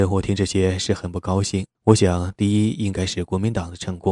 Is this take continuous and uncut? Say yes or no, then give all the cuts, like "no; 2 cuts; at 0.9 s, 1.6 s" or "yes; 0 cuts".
no; 1 cut; at 1.7 s